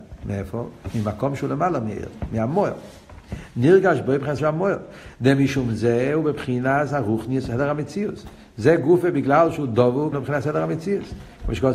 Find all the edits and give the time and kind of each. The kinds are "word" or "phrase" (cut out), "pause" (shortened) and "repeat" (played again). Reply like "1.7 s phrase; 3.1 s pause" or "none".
4.4 s word; 10.1 s word